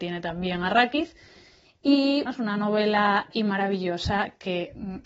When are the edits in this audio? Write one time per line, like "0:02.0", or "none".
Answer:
0:02.3
0:03.3